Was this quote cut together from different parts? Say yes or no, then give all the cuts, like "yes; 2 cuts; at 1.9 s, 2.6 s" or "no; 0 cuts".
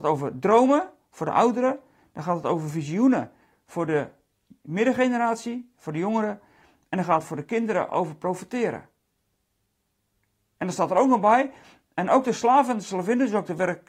no; 0 cuts